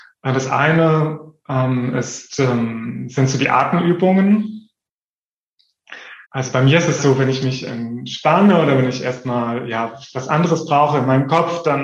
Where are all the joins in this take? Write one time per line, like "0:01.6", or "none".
0:06.2
0:07.0